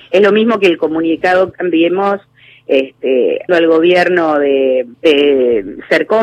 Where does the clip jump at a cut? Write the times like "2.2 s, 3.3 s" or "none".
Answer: 1.5 s, 3.5 s, 4.9 s